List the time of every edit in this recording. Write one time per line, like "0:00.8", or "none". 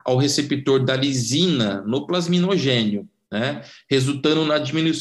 none

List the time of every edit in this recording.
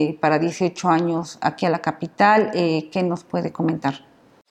none

